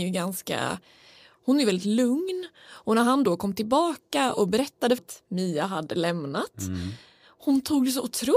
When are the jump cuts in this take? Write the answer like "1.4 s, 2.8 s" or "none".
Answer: 5.0 s